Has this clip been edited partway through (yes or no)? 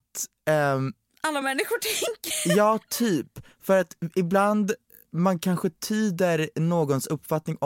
no